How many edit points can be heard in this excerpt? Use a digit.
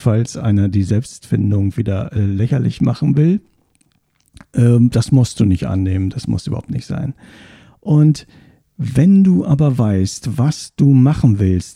0